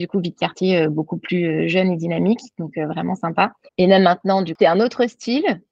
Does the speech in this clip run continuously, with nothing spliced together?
no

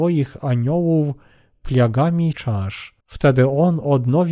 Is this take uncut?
no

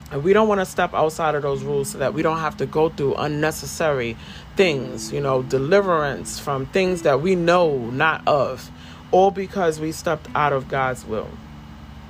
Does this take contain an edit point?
no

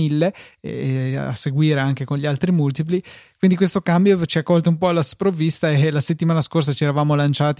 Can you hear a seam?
no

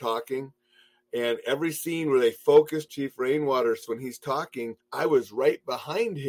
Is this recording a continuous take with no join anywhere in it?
no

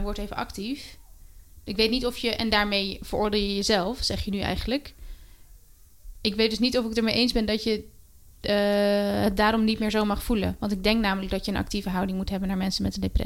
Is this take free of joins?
yes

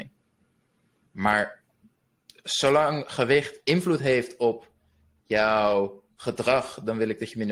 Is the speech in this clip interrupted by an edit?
no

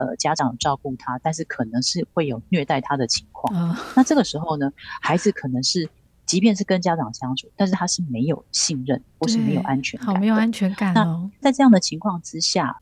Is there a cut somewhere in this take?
no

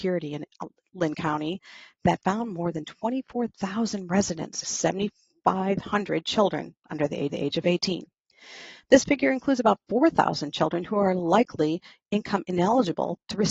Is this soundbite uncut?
no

